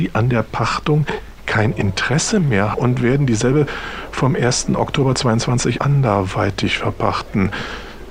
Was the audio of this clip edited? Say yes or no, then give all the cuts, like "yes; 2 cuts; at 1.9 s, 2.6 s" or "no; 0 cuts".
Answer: yes; 2 cuts; at 2.7 s, 5.8 s